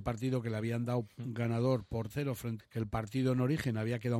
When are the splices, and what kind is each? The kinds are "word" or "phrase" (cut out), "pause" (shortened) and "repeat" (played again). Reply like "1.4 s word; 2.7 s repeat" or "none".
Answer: 2.1 s phrase; 2.6 s phrase